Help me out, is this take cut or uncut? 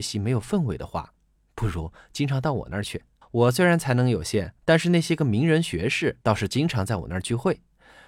cut